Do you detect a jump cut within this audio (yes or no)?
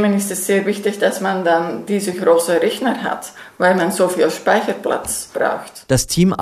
no